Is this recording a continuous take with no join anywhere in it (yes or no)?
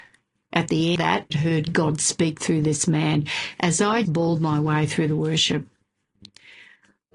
no